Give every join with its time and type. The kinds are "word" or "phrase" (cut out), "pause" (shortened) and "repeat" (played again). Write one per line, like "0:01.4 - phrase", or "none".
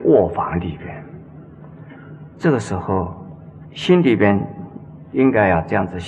0:03.6 - pause